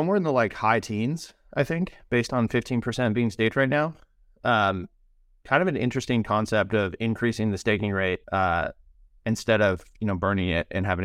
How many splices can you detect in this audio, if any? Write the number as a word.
one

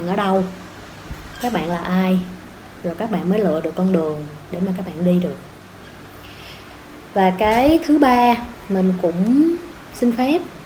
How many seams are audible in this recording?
zero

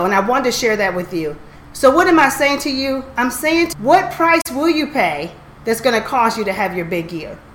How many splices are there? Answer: one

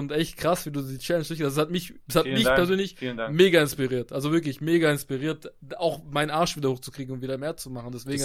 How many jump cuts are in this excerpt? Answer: zero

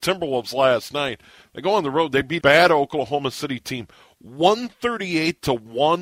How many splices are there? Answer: one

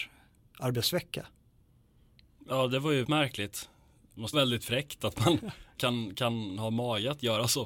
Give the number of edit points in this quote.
three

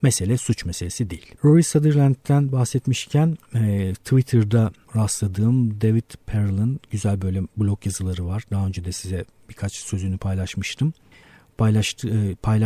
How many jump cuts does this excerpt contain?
one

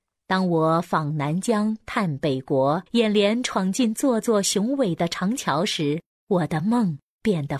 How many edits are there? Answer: two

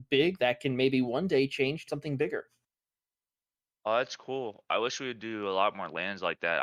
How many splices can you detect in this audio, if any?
one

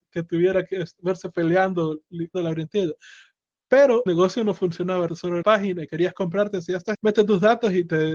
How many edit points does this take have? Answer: six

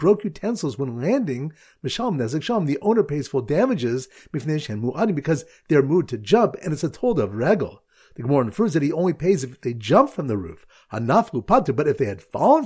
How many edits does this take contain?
zero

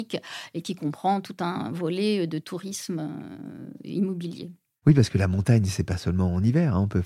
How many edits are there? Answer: zero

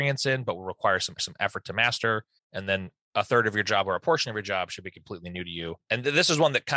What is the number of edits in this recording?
two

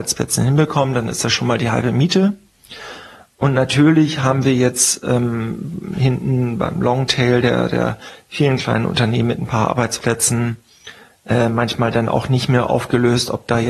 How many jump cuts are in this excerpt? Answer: zero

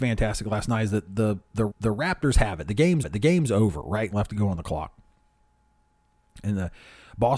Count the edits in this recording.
three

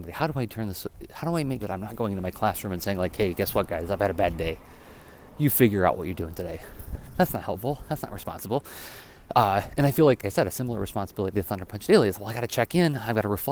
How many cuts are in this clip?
three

